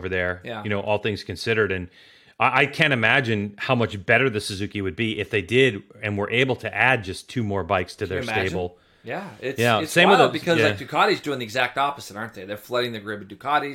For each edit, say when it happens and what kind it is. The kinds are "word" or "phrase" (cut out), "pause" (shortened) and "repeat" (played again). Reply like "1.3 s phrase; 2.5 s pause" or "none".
none

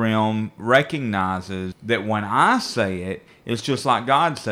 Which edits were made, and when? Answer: none

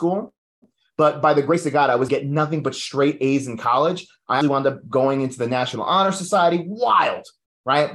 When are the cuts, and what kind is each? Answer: 2.1 s phrase; 4.4 s word

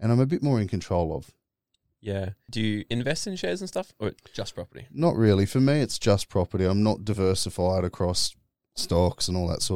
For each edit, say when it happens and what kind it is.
none

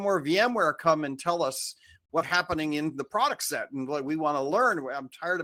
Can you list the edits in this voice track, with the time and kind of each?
2.2 s word

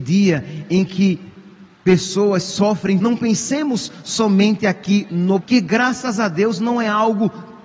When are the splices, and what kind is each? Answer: 1.7 s pause; 3.0 s phrase; 5.4 s word

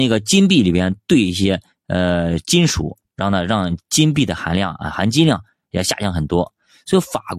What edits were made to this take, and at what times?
none

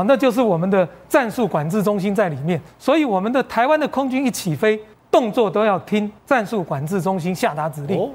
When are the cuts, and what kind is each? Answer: 2.7 s pause; 4.9 s pause; 6.2 s pause

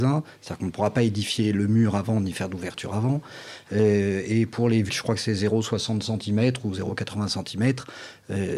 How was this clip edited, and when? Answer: 4.9 s word

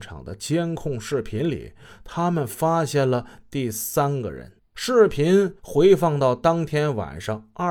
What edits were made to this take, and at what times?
4.6 s pause; 5.6 s pause

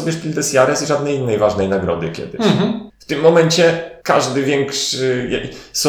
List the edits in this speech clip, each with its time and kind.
2.9 s pause; 4.0 s pause

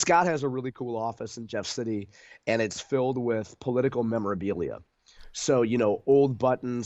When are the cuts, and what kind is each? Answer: none

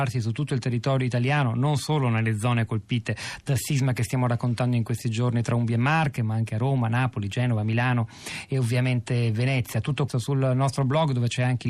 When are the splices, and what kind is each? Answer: 10.1 s word

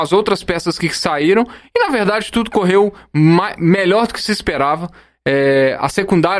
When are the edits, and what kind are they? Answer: none

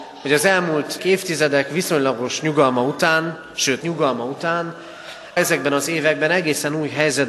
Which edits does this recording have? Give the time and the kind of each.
1.0 s word; 3.8 s word; 5.4 s word

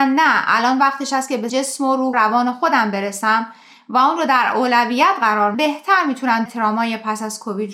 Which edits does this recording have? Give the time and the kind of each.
1.5 s word; 2.1 s word; 5.5 s word; 6.5 s word

